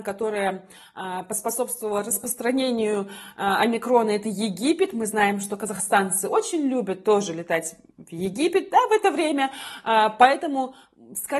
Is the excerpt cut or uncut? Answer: uncut